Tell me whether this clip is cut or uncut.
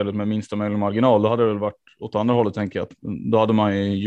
uncut